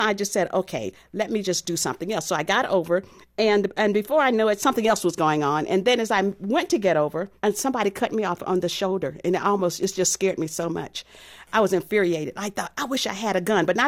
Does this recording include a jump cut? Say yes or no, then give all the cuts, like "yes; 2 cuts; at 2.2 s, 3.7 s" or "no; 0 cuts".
yes; 1 cut; at 7.4 s